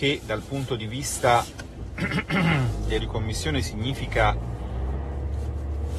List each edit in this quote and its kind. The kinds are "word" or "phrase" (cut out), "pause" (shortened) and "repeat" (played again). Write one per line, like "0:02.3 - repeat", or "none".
0:03.0 - word